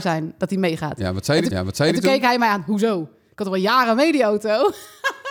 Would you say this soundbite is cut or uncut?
cut